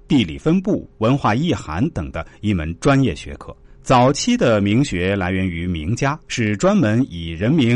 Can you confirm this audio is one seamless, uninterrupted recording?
no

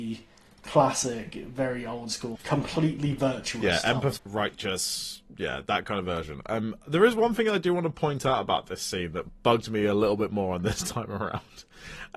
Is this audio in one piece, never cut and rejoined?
no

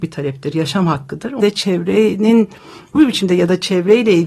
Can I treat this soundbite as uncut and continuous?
no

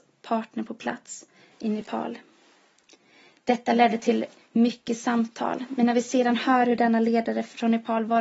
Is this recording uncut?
yes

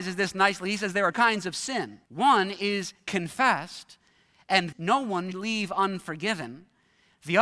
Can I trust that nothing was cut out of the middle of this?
no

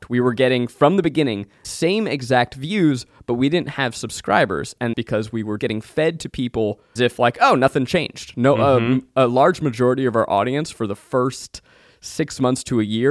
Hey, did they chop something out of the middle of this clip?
yes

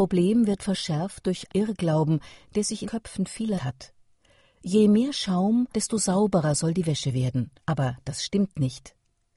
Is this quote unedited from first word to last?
no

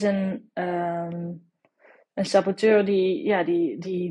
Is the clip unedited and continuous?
yes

